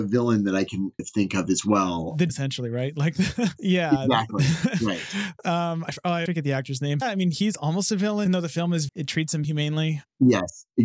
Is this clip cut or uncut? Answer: cut